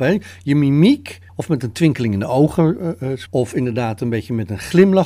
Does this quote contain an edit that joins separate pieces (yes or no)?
no